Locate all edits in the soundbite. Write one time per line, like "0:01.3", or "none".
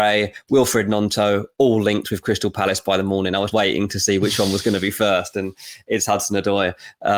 0:03.5